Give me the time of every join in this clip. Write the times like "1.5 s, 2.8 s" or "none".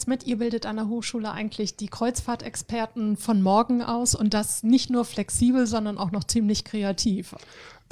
none